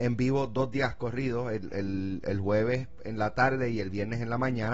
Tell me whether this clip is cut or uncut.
uncut